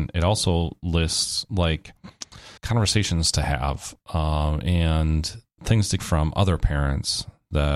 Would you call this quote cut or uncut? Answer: cut